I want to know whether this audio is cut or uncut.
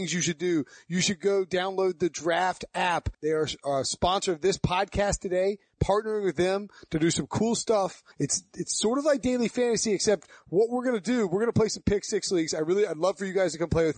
cut